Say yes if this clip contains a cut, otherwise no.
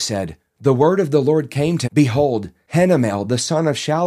yes